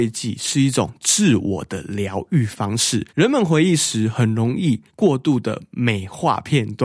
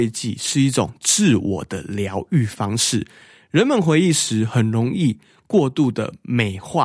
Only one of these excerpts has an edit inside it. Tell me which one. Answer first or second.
first